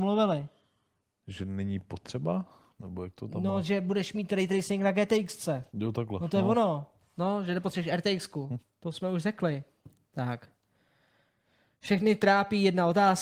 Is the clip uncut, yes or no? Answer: no